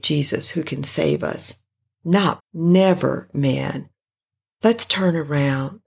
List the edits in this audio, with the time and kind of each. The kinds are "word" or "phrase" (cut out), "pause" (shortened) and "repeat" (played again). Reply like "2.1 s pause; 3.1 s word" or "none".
2.4 s word